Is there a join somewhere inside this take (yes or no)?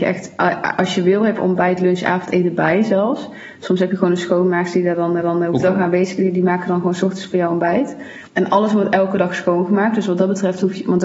yes